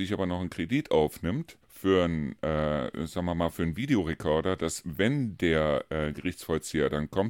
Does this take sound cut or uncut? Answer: cut